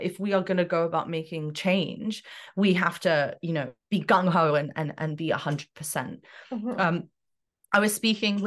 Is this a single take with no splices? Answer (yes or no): no